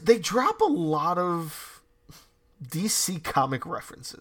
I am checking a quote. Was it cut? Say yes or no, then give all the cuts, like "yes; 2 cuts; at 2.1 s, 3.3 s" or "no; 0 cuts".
no; 0 cuts